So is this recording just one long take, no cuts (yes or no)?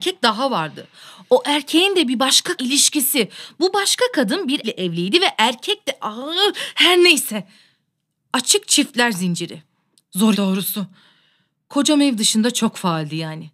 no